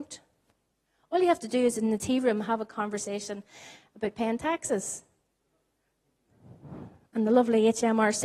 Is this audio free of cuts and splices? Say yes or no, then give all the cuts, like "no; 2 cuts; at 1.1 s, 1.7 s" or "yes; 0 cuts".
yes; 0 cuts